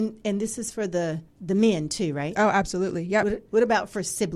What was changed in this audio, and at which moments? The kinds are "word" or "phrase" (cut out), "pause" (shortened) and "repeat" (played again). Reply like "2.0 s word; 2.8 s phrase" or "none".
1.3 s pause